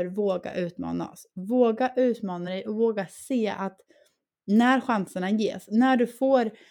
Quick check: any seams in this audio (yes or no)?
no